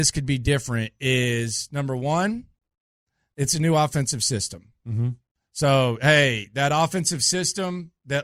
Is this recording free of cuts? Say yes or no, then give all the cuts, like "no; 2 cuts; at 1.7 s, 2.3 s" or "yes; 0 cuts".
yes; 0 cuts